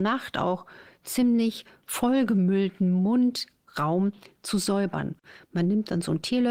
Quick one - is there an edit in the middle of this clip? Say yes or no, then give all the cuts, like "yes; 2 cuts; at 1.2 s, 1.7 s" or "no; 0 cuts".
no; 0 cuts